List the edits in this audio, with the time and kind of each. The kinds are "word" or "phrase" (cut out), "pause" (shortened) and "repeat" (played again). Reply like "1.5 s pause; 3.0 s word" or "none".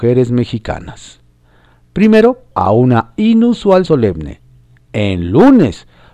2.5 s word; 3.9 s word